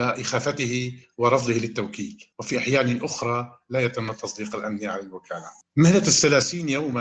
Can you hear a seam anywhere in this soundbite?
yes; 1 cut; at 2.3 s

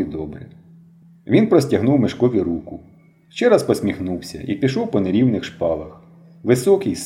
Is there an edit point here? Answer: no; 0 cuts

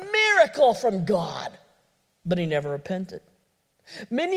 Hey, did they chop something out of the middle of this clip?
no; 0 cuts

